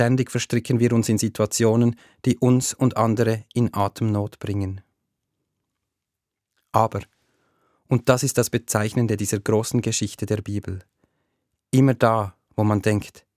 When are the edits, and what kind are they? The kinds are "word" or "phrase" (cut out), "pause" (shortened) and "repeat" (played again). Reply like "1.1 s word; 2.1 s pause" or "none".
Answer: none